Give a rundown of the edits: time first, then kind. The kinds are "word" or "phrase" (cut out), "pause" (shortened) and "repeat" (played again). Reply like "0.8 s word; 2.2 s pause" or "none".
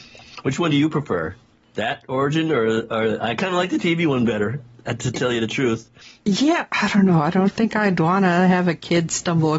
none